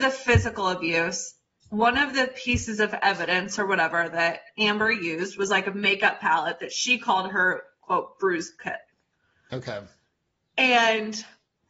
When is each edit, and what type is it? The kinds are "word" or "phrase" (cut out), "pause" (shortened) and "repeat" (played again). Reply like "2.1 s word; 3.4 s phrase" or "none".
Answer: none